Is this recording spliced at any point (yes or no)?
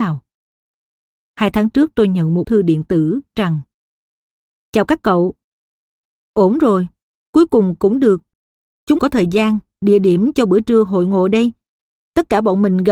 yes